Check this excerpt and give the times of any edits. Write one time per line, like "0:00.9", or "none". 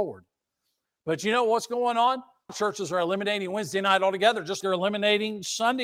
0:02.5
0:04.6